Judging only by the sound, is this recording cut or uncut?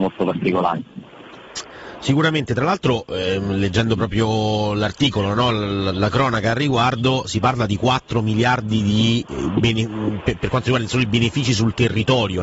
uncut